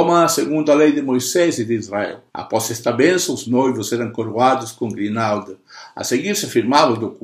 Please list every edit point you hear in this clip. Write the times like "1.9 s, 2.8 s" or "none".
2.3 s